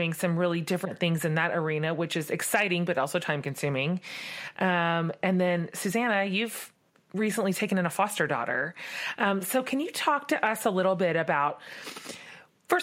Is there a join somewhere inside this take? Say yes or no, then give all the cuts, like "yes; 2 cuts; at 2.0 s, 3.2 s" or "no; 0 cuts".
no; 0 cuts